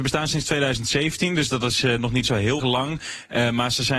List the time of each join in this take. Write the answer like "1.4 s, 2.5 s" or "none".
2.2 s, 2.6 s